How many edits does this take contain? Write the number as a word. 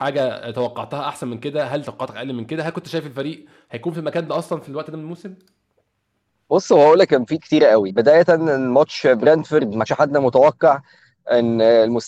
four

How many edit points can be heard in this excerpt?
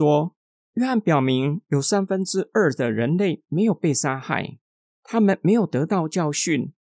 zero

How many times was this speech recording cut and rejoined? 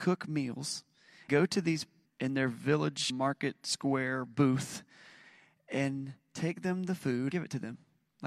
four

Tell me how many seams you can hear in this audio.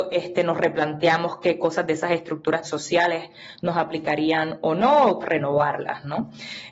two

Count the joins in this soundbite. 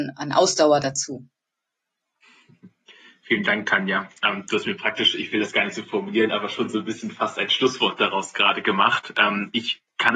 zero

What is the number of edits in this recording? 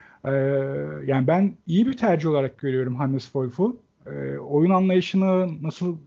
one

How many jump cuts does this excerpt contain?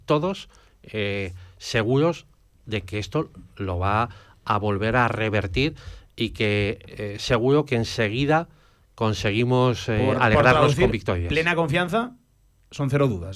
zero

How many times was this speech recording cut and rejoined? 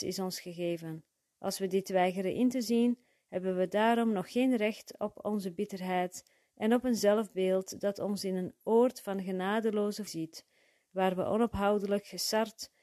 one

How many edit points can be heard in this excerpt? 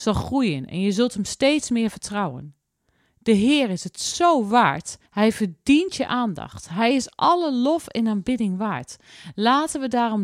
one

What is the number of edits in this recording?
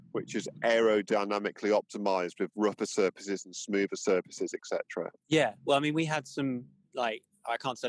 one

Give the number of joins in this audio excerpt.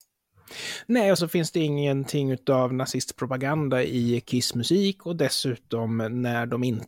one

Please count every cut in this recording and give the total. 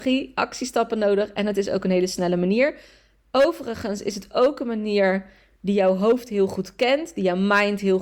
zero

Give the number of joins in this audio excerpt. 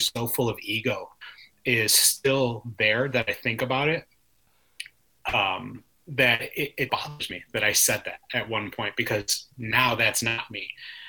one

